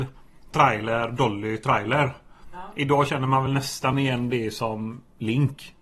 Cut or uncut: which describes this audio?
uncut